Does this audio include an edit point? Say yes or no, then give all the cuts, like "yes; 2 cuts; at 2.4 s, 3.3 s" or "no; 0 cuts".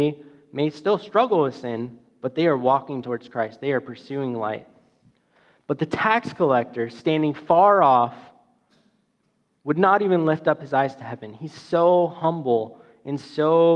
no; 0 cuts